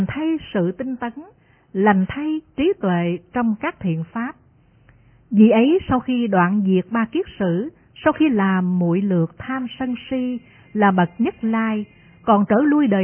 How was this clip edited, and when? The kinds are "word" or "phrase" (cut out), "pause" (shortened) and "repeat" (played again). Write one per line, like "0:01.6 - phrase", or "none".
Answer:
none